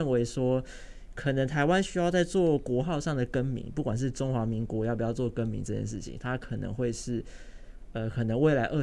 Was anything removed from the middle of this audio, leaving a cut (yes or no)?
no